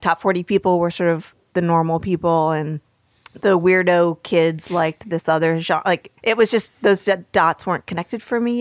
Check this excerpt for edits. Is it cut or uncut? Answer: cut